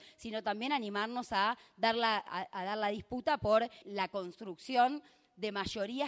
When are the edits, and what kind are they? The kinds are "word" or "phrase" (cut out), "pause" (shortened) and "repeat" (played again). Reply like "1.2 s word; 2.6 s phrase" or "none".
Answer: 3.8 s word